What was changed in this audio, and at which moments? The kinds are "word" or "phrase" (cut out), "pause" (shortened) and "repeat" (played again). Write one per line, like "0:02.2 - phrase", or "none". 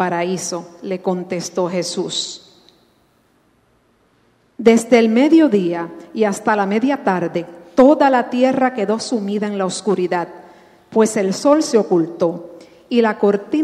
none